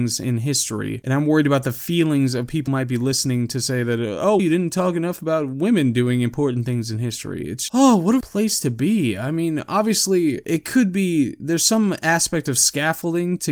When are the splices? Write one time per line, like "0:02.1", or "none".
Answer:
0:02.7
0:04.4
0:07.7
0:08.2